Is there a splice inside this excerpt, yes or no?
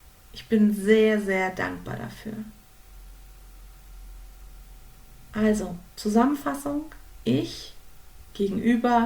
yes